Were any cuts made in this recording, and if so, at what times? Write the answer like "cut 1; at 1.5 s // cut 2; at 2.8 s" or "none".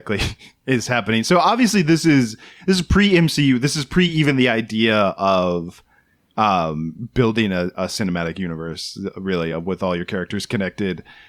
none